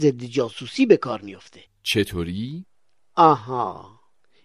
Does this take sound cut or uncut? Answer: cut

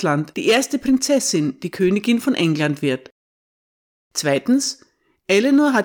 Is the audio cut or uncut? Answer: uncut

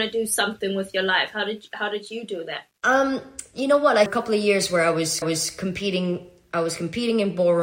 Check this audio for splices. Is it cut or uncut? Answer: cut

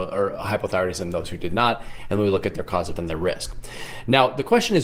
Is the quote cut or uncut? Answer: cut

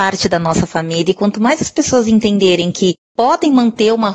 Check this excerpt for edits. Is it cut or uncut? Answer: uncut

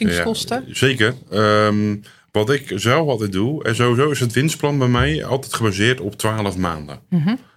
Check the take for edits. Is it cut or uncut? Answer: uncut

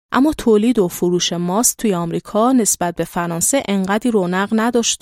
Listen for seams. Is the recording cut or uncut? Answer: uncut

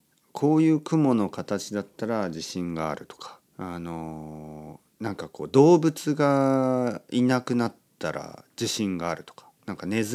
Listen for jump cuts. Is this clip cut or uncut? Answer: cut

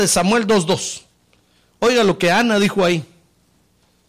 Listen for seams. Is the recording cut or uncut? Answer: uncut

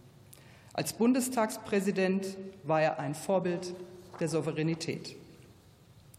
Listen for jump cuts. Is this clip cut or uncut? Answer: uncut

